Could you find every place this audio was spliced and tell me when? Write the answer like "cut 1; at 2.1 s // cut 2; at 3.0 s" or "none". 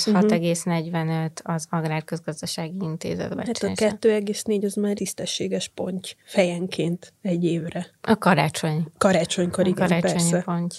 cut 1; at 4.9 s